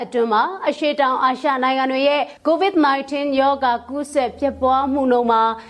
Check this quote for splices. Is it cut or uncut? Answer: cut